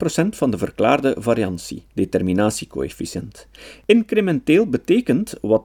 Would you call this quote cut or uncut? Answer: cut